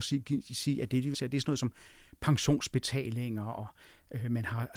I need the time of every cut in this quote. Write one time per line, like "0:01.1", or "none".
0:01.1